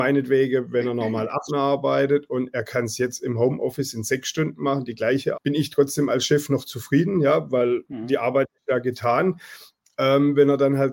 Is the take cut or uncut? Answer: cut